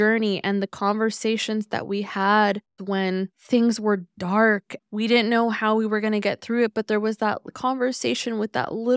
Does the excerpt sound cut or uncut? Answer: cut